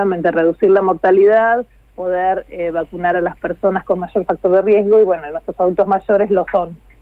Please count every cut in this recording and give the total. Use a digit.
0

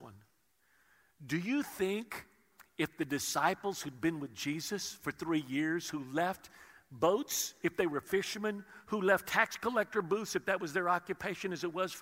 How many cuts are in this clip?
0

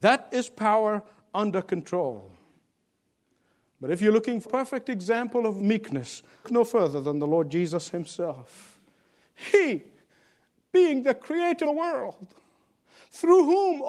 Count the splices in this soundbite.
3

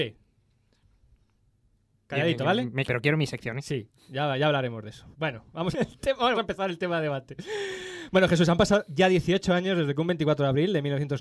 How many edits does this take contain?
4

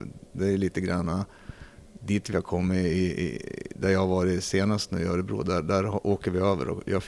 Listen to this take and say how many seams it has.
0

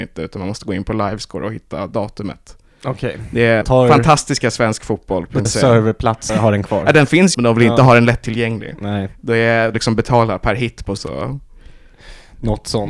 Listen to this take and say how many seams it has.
6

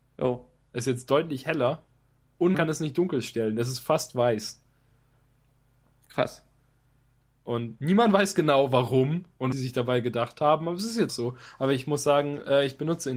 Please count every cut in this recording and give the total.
4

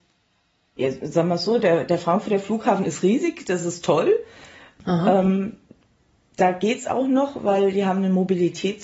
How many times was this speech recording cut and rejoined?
0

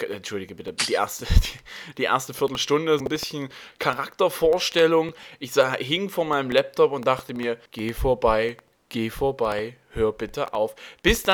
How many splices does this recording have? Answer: 2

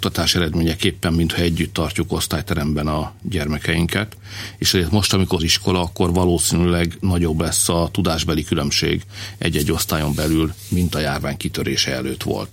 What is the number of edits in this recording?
1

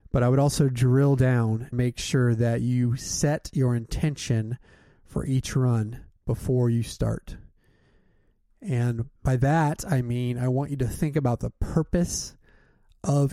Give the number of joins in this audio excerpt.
2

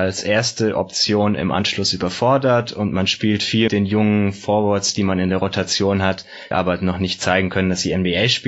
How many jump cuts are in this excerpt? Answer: 2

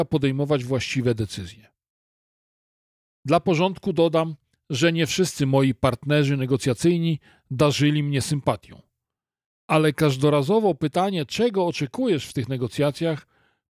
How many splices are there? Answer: 0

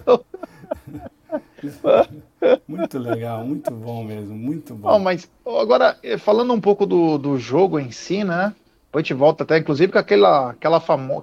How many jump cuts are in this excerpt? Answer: 0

